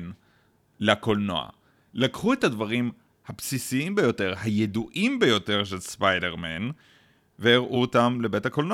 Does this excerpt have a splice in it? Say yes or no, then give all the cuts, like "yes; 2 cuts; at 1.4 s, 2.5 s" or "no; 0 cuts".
no; 0 cuts